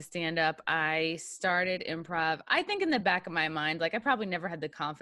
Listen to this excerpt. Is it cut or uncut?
uncut